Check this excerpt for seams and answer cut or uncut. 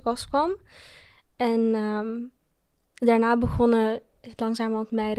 uncut